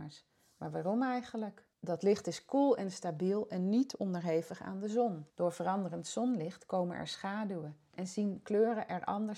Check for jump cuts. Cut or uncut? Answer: cut